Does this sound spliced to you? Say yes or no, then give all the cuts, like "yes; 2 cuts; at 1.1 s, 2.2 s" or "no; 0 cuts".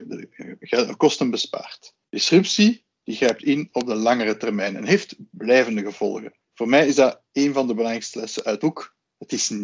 yes; 1 cut; at 8.6 s